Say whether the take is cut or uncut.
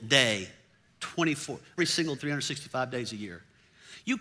cut